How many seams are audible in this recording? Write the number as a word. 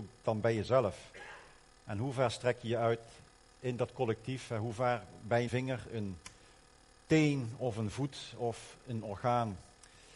one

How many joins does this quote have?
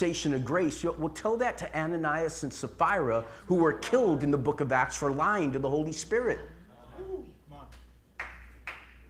zero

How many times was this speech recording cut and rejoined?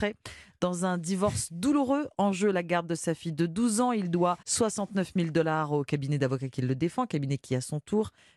one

